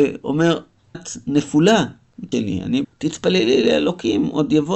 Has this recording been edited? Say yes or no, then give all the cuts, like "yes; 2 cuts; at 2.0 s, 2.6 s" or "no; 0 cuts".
yes; 3 cuts; at 0.9 s, 2.3 s, 2.8 s